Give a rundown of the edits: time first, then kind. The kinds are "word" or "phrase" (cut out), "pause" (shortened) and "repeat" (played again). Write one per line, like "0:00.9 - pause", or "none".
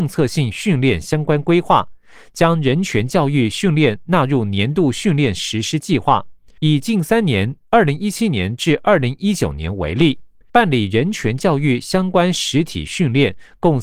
0:06.6 - pause
0:10.5 - pause